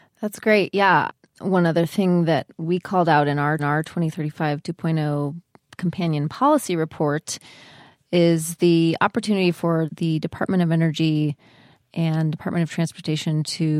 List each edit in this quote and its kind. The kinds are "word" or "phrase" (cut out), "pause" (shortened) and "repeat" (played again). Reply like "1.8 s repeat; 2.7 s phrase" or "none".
3.6 s repeat; 9.9 s word

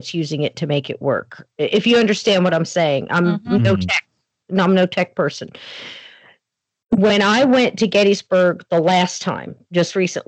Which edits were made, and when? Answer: none

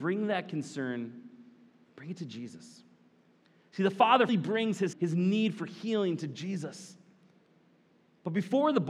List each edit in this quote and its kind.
4.3 s word; 4.9 s word

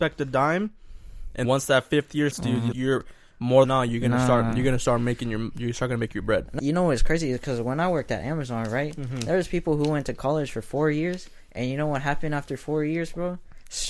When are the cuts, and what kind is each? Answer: 1.4 s word; 2.3 s word; 2.7 s word; 3.6 s phrase; 6.6 s phrase

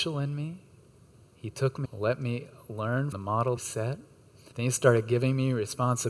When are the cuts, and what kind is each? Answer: 1.8 s word; 3.1 s word; 3.6 s phrase; 4.5 s pause

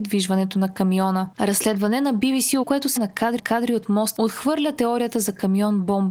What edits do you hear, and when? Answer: 2.6 s word; 3.0 s word; 3.4 s repeat; 4.1 s phrase

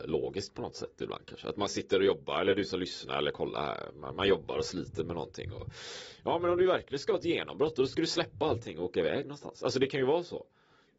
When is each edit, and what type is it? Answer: none

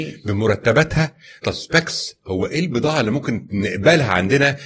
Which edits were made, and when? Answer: 1.4 s word

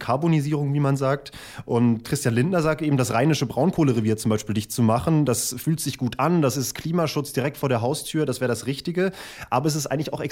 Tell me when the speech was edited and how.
2.0 s word

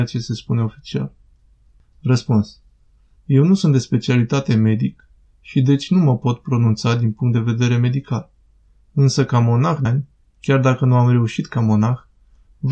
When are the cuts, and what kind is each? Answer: 9.8 s word

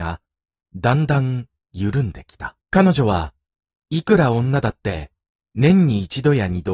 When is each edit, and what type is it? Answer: 2.6 s pause

